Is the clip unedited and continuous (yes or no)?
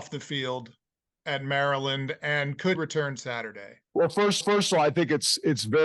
no